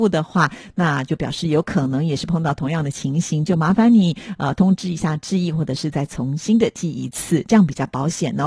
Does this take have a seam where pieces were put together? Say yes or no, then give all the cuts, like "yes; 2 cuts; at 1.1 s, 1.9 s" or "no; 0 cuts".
no; 0 cuts